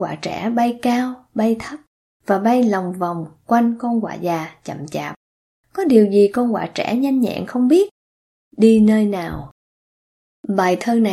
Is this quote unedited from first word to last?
yes; 0 cuts

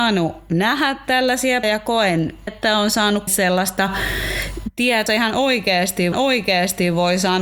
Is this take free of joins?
no; 5 cuts; at 1.6 s, 2.5 s, 3.3 s, 5.1 s, 6.1 s

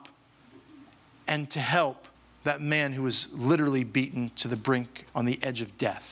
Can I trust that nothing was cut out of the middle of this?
no; 2 cuts; at 2.1 s, 5.1 s

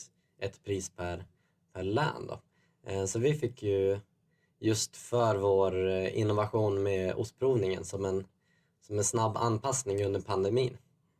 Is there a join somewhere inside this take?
no; 0 cuts

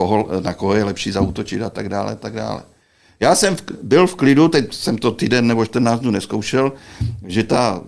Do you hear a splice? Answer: no; 0 cuts

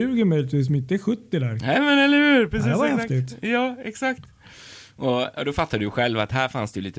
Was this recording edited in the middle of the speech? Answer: no; 0 cuts

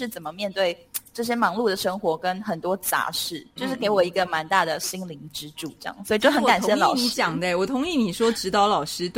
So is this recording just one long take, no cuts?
no; 1 cut; at 3.6 s

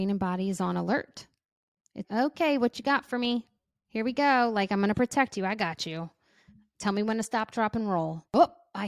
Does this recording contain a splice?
yes; 1 cut; at 2.0 s

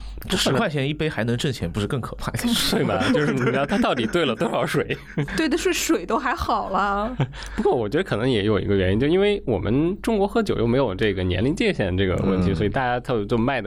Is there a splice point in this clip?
yes; 1 cut; at 5.3 s

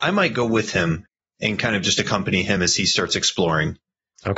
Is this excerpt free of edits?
yes; 0 cuts

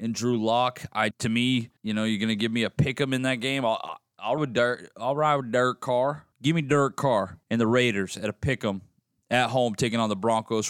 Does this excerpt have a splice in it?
yes; 5 cuts; at 1.1 s, 1.8 s, 4.4 s, 6.3 s, 7.4 s

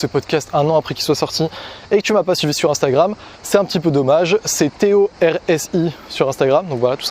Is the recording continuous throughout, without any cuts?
yes; 0 cuts

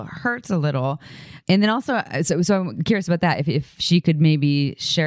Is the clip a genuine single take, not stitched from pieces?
yes; 0 cuts

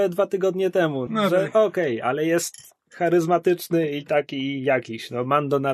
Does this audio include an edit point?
yes; 1 cut; at 1.1 s

